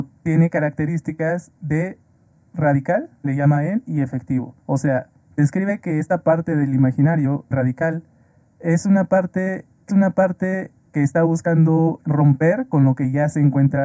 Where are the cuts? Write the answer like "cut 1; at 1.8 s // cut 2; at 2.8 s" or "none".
cut 1; at 1.6 s // cut 2; at 3.1 s // cut 3; at 4.6 s // cut 4; at 5.2 s // cut 5; at 7.5 s // cut 6; at 9.9 s // cut 7; at 12.0 s